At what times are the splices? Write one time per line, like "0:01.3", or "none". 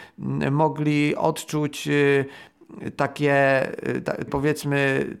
0:04.3